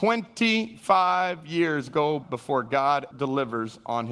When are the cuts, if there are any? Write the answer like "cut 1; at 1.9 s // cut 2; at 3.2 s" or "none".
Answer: cut 1; at 2.2 s // cut 2; at 3.1 s

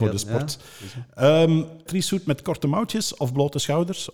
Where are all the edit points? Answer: cut 1; at 1.9 s

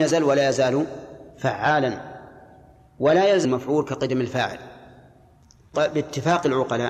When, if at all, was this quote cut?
cut 1; at 1.3 s // cut 2; at 3.4 s // cut 3; at 5.7 s

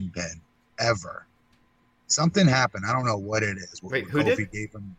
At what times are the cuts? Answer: none

